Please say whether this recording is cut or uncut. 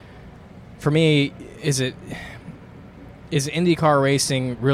uncut